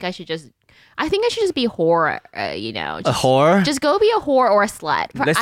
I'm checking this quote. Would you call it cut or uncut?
uncut